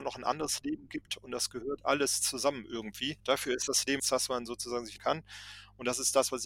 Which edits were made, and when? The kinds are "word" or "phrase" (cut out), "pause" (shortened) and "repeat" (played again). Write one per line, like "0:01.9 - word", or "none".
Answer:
0:03.2 - pause
0:04.0 - phrase
0:05.0 - phrase

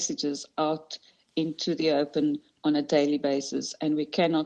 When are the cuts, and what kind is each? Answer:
none

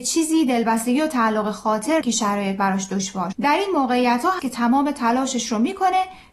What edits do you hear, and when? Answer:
0:02.0 - word
0:03.3 - word
0:04.4 - word

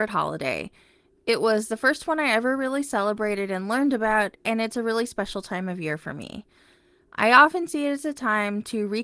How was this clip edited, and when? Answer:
none

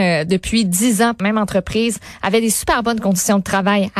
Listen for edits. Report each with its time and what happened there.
0:01.2 - word

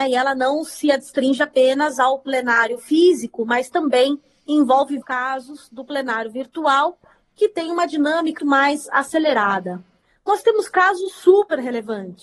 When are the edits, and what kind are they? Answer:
0:05.0 - word
0:08.4 - word

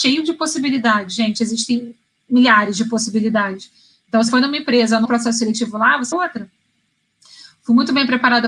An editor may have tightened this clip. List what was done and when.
0:04.3 - word
0:05.0 - word
0:06.1 - word

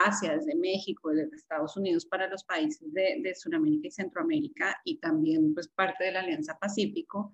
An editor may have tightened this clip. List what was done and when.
none

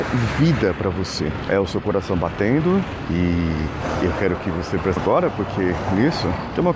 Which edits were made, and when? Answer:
0:05.0 - word

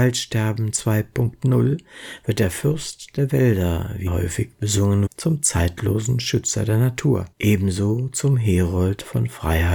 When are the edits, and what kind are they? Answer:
0:04.1 - word
0:05.1 - word
0:07.3 - pause

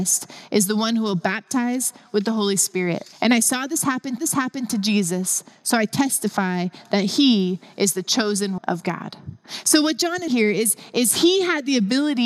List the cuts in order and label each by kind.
0:03.1 - pause
0:04.2 - repeat
0:08.6 - word
0:10.3 - word

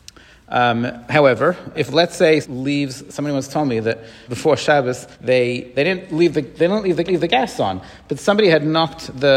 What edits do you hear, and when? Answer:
0:01.7 - word
0:02.4 - word
0:04.2 - word
0:05.1 - pause
0:07.1 - repeat

